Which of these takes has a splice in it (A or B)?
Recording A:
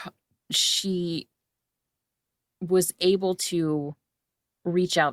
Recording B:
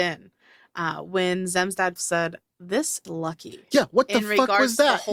B